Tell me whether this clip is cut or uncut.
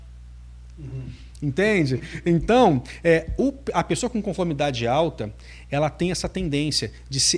uncut